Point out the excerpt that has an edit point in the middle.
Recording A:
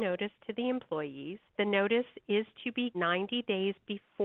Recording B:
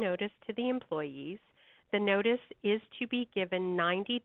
A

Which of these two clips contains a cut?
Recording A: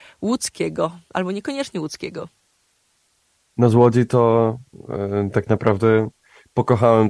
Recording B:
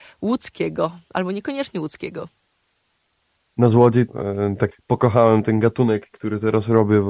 B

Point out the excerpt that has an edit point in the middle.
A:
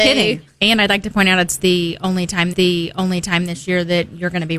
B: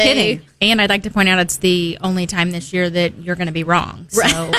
A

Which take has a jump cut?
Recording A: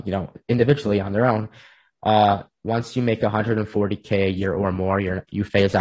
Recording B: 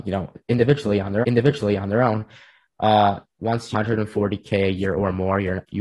B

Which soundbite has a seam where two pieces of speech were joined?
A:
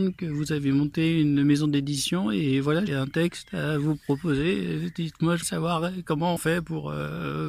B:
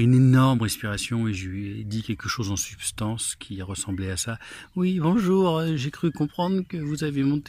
A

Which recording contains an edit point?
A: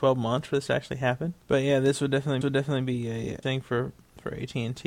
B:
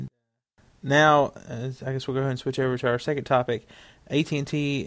A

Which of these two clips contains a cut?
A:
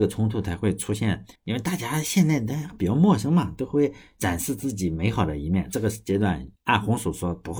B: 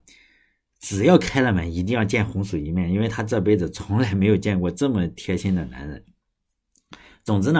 A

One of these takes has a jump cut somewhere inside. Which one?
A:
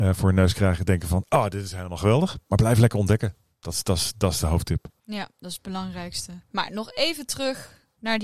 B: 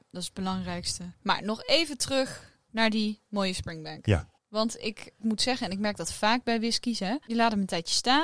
B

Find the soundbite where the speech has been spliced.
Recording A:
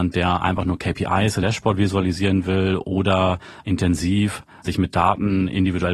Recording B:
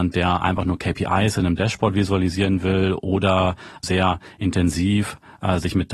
A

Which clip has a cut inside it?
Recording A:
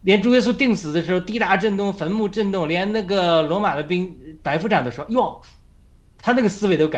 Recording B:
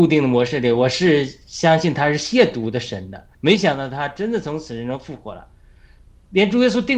B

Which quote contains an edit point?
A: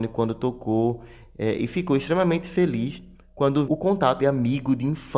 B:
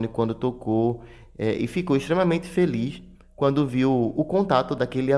A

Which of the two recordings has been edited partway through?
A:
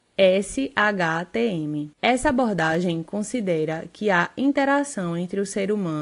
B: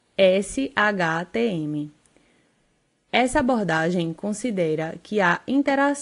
A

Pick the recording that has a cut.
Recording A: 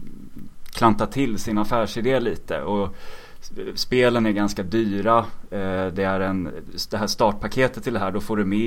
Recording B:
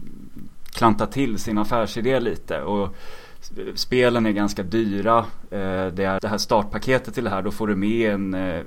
B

